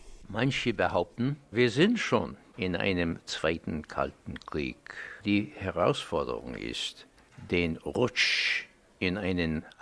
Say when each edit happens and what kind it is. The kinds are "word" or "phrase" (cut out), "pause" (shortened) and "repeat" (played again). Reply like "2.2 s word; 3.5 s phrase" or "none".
5.2 s pause